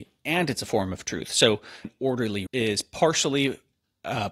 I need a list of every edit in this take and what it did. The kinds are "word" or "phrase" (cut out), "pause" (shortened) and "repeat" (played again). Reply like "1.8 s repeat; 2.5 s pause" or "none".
1.8 s word; 2.5 s word